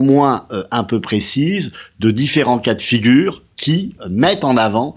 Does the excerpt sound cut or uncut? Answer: uncut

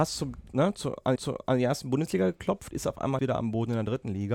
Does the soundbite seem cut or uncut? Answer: cut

